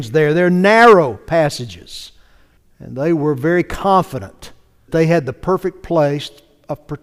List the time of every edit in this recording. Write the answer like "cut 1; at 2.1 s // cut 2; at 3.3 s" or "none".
cut 1; at 2.6 s // cut 2; at 4.9 s